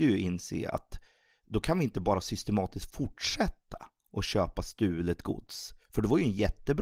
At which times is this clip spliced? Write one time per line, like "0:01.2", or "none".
none